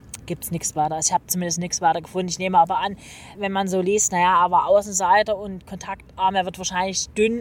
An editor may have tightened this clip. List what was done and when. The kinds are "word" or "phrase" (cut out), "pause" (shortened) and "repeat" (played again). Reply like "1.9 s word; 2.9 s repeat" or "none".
3.3 s word